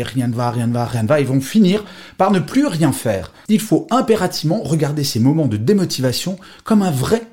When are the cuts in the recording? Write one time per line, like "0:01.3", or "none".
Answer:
none